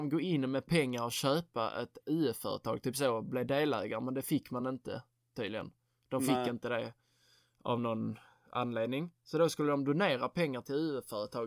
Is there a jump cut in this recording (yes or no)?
no